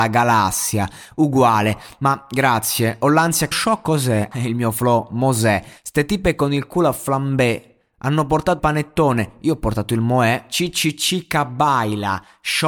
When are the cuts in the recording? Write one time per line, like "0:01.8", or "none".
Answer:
0:03.5
0:04.3
0:05.8
0:08.6

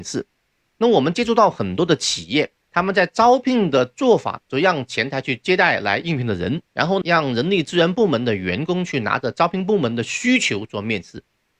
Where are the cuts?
0:06.7

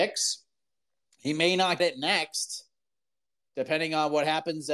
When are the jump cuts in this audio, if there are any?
0:01.8

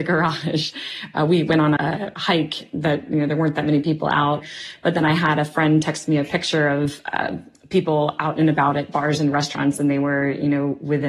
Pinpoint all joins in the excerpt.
0:01.8

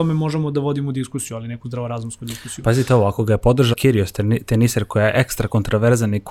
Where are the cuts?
0:03.7

